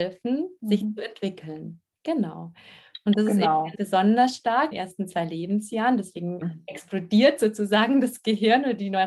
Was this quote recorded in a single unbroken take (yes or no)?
no